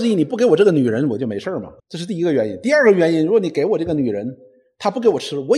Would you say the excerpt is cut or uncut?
cut